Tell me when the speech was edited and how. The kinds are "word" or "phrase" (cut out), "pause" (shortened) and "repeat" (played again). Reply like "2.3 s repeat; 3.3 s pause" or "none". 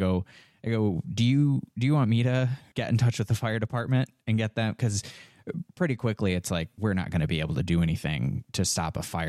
none